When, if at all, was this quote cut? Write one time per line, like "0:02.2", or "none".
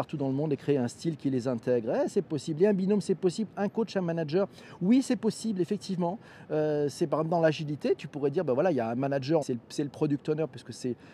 0:09.4